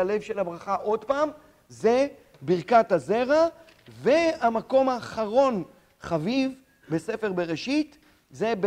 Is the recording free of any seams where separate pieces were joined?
yes; 0 cuts

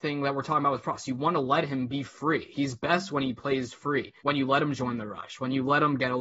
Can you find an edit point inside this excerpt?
yes; 1 cut; at 4.2 s

